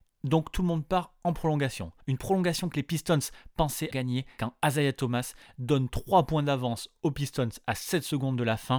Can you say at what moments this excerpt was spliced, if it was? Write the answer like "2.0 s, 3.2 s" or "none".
2.0 s, 3.9 s